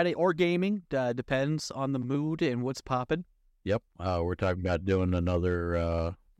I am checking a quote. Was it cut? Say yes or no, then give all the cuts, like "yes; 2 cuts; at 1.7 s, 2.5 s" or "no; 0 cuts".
no; 0 cuts